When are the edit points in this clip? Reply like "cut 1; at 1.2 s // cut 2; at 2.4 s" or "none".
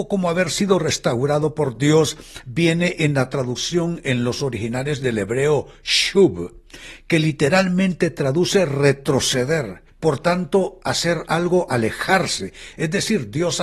cut 1; at 9.9 s